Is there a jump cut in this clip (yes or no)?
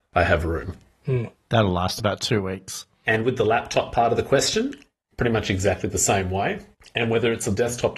no